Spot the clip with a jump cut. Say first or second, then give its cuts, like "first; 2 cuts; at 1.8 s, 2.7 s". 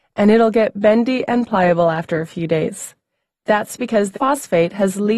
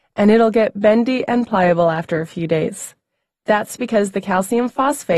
first; 1 cut; at 4.1 s